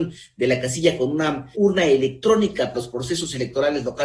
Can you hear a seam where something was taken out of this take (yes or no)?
yes